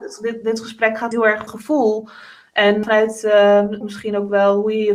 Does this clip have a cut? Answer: yes; 4 cuts; at 1.1 s, 1.5 s, 2.8 s, 3.8 s

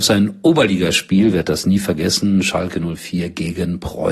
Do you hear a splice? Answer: no; 0 cuts

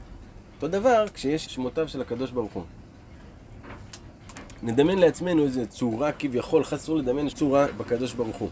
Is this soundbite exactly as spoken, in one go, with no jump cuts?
no; 3 cuts; at 1.5 s, 6.8 s, 7.3 s

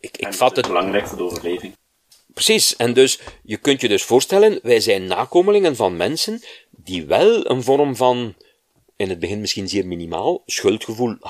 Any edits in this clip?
no; 0 cuts

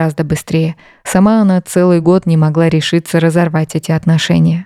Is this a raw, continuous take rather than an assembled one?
yes; 0 cuts

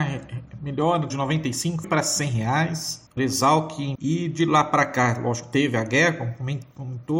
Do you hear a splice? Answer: yes; 4 cuts; at 1.1 s, 1.8 s, 3.2 s, 3.9 s

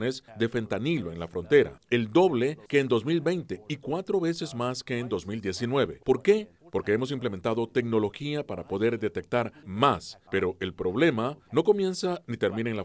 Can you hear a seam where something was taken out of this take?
no; 0 cuts

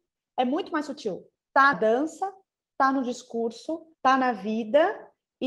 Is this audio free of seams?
no; 2 cuts; at 1.7 s, 3.9 s

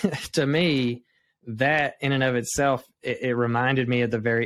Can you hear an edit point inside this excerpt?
no; 0 cuts

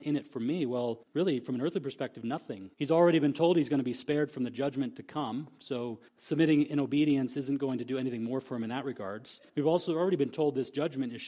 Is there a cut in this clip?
yes; 4 cuts; at 1.0 s, 2.7 s, 6.1 s, 9.5 s

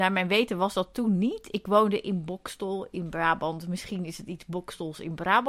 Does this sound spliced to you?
no; 0 cuts

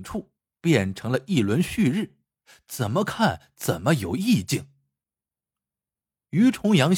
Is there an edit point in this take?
no; 0 cuts

